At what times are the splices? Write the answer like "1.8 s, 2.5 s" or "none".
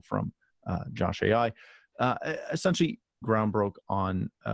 3.2 s